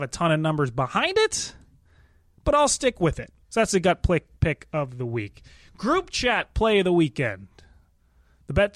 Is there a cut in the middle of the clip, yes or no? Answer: yes